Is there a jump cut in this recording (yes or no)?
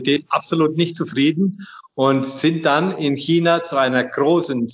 no